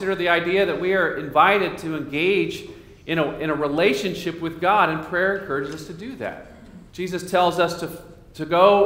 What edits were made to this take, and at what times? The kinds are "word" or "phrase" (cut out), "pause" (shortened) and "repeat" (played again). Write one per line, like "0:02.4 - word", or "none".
0:06.9 - pause